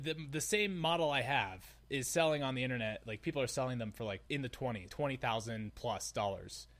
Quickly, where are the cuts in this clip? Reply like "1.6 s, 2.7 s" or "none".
4.3 s, 4.9 s